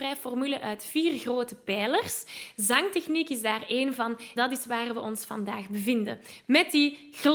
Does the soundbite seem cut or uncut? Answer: cut